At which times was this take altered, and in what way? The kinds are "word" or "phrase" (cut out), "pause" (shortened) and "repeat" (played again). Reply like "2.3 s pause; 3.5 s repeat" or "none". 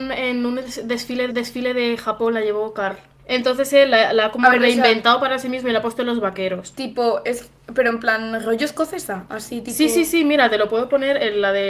1.3 s repeat; 3.2 s pause